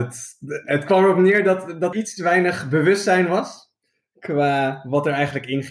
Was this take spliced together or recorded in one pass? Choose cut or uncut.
cut